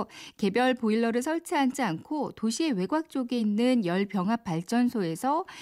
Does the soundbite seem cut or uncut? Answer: uncut